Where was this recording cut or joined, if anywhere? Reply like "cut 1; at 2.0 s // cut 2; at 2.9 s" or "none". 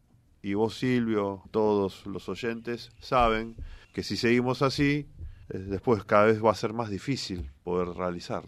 cut 1; at 1.4 s // cut 2; at 3.8 s // cut 3; at 5.4 s